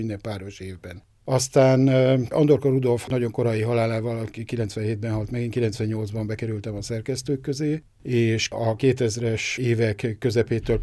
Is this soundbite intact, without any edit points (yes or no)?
yes